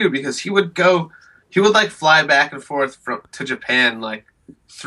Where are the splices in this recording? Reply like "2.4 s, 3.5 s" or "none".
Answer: none